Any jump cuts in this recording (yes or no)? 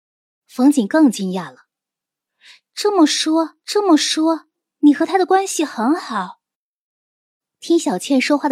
yes